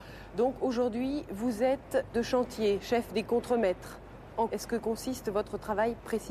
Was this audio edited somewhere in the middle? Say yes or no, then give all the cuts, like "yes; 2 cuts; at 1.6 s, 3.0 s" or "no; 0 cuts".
yes; 2 cuts; at 2.1 s, 4.5 s